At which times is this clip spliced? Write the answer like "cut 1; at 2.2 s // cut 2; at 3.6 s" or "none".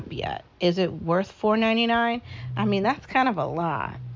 none